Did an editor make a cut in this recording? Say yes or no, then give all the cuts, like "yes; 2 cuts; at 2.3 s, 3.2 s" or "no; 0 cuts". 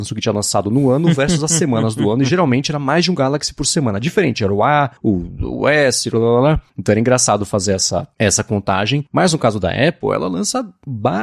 yes; 2 cuts; at 5.0 s, 6.7 s